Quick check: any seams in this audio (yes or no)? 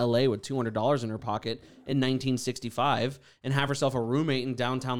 no